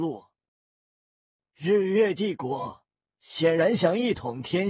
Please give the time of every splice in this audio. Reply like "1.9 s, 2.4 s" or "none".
none